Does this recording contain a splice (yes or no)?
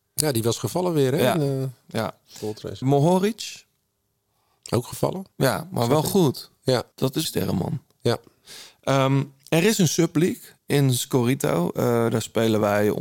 yes